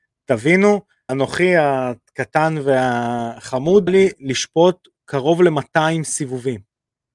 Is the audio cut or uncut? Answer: cut